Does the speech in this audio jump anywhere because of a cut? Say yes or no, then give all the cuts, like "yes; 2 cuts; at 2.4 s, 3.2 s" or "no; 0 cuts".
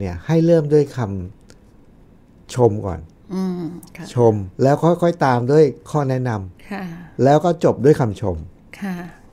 yes; 3 cuts; at 1.3 s, 4.5 s, 6.6 s